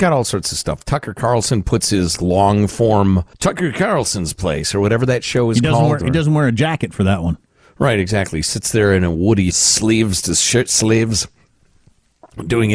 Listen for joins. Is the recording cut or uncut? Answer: cut